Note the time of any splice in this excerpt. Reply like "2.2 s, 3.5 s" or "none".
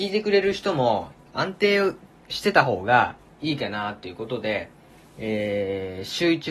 none